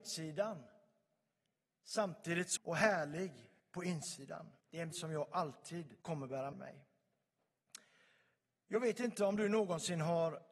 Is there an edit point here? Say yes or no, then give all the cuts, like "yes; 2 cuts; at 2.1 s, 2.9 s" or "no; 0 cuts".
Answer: yes; 6 cuts; at 2.6 s, 3.6 s, 4.6 s, 4.9 s, 6.0 s, 6.5 s